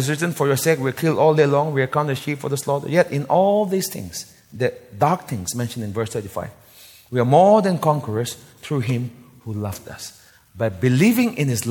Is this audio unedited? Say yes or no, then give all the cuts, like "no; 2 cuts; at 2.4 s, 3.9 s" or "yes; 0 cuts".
yes; 0 cuts